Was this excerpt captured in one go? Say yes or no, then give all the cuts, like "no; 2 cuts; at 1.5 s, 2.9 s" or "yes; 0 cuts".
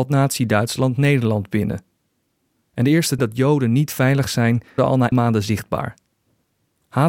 no; 3 cuts; at 3.2 s, 4.8 s, 5.1 s